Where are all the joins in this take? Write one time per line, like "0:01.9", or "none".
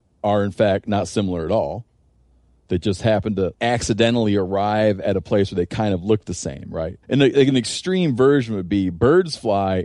0:03.5
0:07.0

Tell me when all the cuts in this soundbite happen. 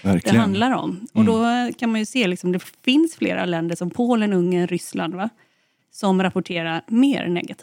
none

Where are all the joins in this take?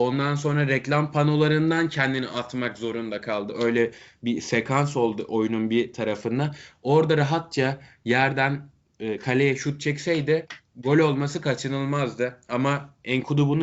none

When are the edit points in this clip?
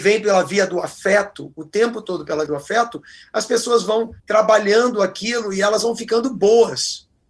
0:02.5
0:04.2

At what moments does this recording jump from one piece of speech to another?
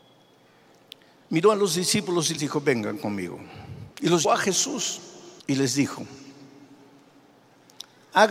0:02.4
0:03.9
0:04.2
0:05.4

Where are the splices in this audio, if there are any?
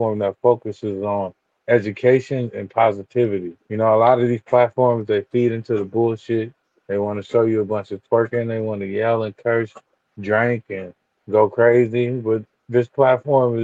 0:03.6

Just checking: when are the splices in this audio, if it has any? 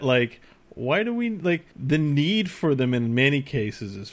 0:01.7

